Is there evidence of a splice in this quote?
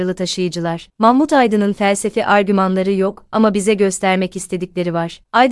no; 0 cuts

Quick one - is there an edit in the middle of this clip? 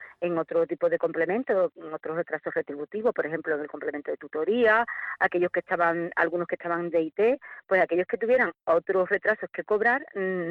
no; 0 cuts

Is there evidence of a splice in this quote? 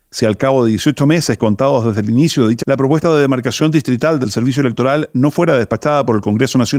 yes; 1 cut; at 2.6 s

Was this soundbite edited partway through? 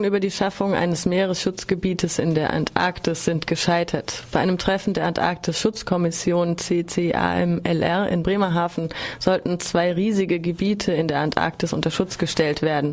no; 0 cuts

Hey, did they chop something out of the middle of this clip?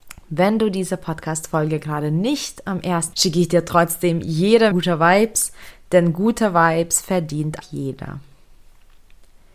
yes; 3 cuts; at 3.1 s, 4.7 s, 7.6 s

